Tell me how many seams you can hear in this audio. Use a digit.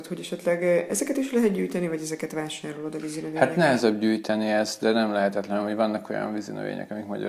0